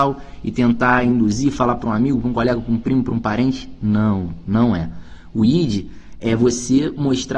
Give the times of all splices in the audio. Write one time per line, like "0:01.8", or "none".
none